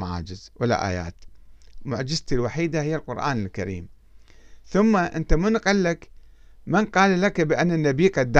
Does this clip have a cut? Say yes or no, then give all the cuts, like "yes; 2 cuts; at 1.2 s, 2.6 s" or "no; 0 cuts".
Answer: no; 0 cuts